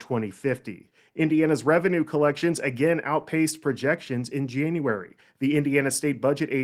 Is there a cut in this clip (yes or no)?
no